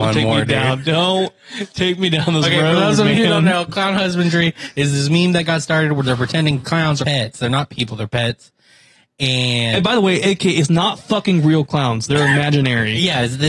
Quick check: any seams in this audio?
yes; 2 cuts; at 6.6 s, 7.0 s

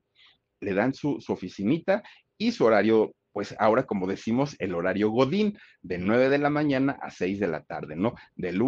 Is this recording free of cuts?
yes; 0 cuts

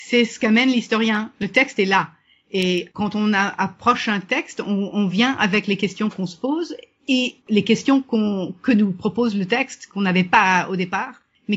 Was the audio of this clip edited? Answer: no; 0 cuts

